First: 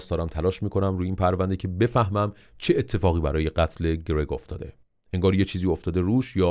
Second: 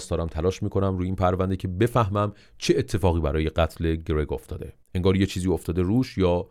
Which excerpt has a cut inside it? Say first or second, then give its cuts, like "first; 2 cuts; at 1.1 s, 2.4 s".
second; 1 cut; at 4.8 s